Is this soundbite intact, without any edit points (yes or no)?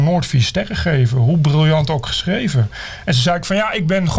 yes